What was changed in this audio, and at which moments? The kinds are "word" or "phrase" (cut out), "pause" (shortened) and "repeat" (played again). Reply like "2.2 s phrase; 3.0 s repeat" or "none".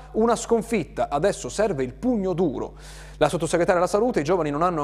none